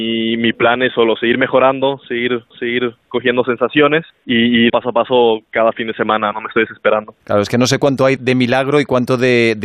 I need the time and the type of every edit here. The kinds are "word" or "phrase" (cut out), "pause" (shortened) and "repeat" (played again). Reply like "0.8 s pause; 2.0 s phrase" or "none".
2.5 s repeat; 4.1 s pause; 4.7 s word; 6.3 s word; 7.2 s pause; 8.2 s word